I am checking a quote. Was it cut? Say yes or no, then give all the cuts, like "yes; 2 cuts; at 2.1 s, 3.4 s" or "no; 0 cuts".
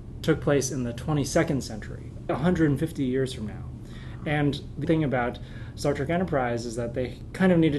yes; 2 cuts; at 2.3 s, 4.8 s